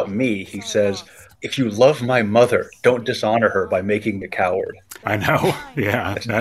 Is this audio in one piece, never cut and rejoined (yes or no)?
no